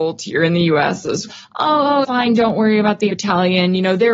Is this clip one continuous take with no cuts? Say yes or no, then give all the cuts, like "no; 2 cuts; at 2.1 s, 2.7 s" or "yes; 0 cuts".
no; 3 cuts; at 1.3 s, 2.0 s, 3.1 s